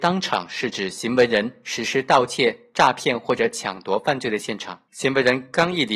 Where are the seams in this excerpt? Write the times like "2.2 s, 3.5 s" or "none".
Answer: 4.9 s